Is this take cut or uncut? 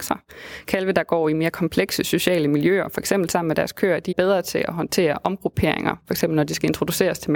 cut